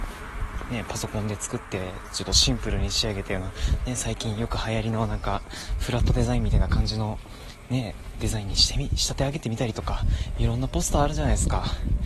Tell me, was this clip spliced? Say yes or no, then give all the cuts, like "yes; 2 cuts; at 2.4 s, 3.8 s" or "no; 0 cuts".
no; 0 cuts